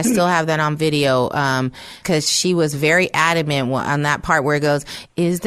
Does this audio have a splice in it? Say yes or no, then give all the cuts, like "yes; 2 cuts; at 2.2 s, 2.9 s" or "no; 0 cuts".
yes; 1 cut; at 2.0 s